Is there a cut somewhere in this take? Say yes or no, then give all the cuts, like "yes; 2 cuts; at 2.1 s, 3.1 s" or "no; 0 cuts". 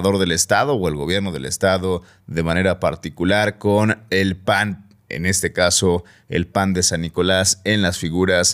no; 0 cuts